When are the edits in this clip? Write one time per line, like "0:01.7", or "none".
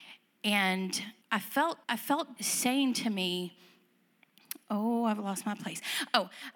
0:01.2
0:01.8
0:02.4